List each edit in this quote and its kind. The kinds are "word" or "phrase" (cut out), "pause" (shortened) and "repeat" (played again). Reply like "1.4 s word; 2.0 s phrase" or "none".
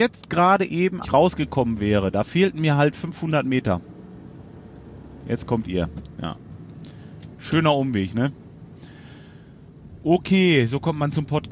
1.0 s phrase